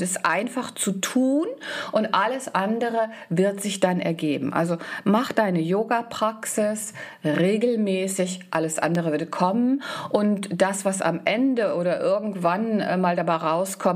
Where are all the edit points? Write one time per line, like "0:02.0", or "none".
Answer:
none